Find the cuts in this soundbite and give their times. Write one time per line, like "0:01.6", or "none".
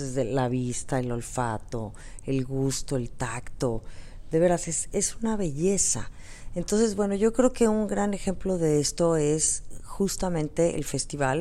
0:04.9